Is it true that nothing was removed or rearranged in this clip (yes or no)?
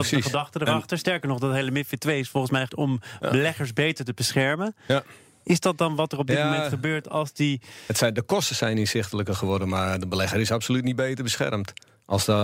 no